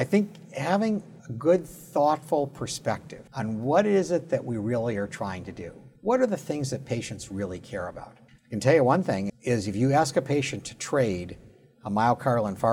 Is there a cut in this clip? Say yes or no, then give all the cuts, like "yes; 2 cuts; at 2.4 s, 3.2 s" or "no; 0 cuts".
yes; 5 cuts; at 1.2 s, 3.3 s, 6.0 s, 8.3 s, 9.3 s